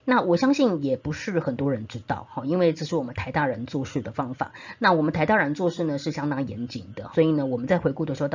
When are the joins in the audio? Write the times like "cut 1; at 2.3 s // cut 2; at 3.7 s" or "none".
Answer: cut 1; at 7.1 s

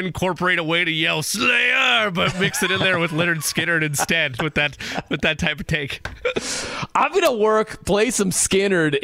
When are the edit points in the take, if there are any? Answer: cut 1; at 4.4 s

